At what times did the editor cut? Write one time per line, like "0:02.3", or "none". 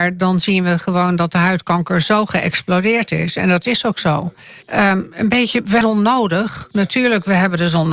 0:04.6
0:05.8